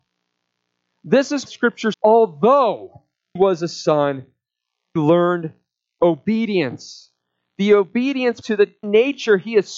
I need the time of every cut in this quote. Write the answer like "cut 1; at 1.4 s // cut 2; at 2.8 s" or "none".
cut 1; at 1.5 s // cut 2; at 1.9 s // cut 3; at 3.4 s // cut 4; at 5.0 s // cut 5; at 8.4 s // cut 6; at 8.8 s